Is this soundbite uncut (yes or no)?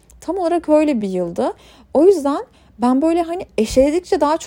yes